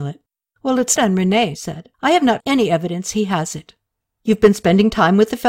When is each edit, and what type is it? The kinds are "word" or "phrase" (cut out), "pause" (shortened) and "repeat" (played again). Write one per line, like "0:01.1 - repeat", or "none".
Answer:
0:01.0 - word
0:01.5 - word
0:01.9 - pause
0:02.4 - word
0:04.0 - pause